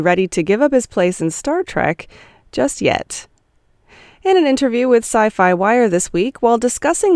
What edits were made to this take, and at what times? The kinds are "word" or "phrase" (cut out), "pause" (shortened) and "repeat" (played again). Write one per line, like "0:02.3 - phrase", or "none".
none